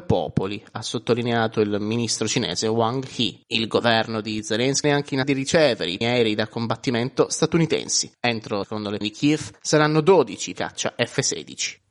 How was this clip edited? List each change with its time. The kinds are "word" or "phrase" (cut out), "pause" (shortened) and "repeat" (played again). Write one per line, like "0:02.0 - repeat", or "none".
0:04.8 - word
0:05.2 - word
0:06.0 - word
0:08.6 - word
0:09.0 - word
0:10.5 - phrase